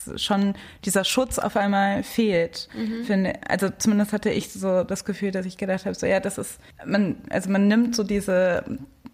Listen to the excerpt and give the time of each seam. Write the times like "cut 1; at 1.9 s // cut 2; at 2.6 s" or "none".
none